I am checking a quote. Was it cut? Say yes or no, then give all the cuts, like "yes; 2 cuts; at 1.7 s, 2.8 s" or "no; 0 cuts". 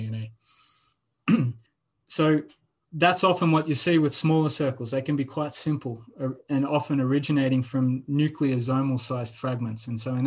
yes; 1 cut; at 1.7 s